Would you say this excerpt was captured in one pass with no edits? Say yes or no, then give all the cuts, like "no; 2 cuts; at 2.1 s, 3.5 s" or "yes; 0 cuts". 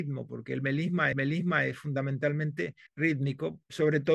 no; 2 cuts; at 1.1 s, 2.9 s